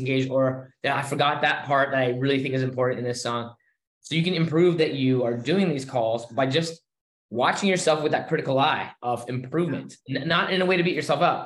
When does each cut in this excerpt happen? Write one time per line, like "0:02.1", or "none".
0:04.8